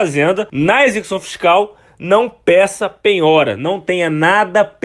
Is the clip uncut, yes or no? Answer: yes